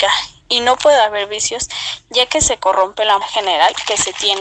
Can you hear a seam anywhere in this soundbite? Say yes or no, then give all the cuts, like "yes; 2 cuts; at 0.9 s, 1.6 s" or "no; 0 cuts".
yes; 1 cut; at 3.2 s